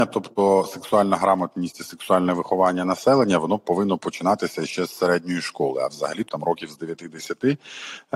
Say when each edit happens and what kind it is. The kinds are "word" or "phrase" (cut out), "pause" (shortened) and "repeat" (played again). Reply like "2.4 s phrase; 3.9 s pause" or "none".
6.3 s phrase